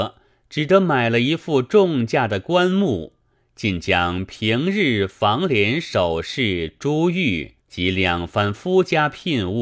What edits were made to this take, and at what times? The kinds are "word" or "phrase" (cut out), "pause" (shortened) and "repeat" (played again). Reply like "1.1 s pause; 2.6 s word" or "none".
7.6 s pause